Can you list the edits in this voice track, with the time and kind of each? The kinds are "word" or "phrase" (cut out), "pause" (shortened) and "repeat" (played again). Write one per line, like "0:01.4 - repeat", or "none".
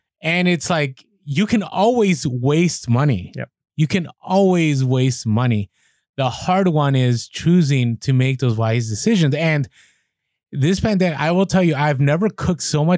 none